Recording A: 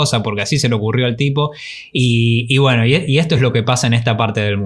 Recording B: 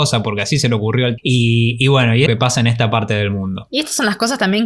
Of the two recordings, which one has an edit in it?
B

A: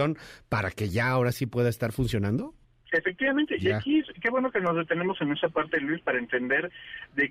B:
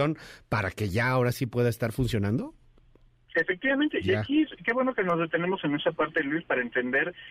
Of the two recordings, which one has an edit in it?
A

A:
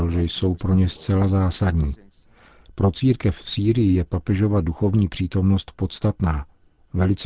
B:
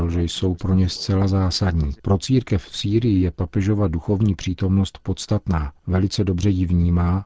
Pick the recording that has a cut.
B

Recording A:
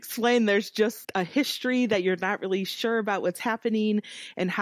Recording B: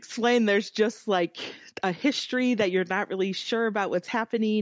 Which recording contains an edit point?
A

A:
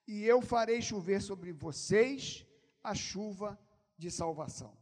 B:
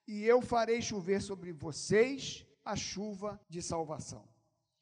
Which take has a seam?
B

